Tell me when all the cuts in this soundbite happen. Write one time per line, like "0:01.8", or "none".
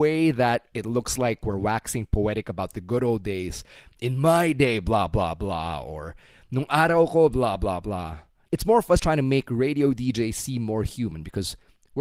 0:09.0